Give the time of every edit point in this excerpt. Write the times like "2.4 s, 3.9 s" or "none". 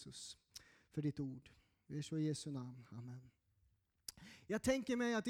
none